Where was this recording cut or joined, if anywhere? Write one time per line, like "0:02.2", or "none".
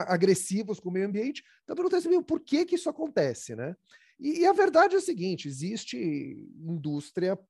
none